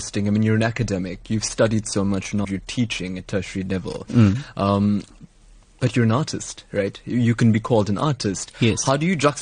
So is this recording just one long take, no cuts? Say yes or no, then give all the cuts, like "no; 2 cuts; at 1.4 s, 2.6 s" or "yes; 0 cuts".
no; 1 cut; at 2.4 s